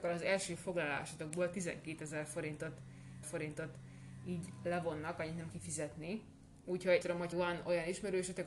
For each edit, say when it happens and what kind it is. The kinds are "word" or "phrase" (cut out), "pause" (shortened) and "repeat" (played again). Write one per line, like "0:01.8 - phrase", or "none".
0:03.2 - repeat
0:05.5 - word
0:07.0 - word
0:07.3 - word